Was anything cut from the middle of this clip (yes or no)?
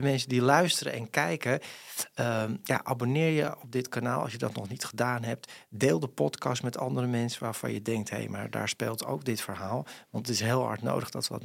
no